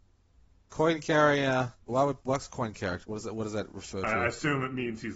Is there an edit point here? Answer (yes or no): yes